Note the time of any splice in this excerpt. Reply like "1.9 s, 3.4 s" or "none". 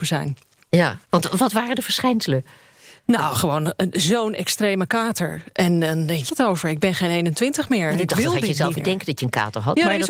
1.0 s, 6.3 s, 8.8 s